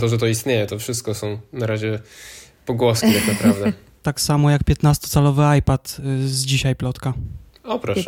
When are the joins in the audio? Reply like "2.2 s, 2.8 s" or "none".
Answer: none